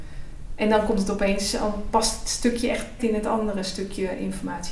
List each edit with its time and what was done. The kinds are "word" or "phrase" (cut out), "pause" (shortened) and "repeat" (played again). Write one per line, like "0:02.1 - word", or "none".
0:03.0 - word